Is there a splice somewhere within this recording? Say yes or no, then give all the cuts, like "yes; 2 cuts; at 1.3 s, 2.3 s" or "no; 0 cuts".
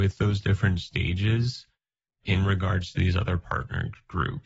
no; 0 cuts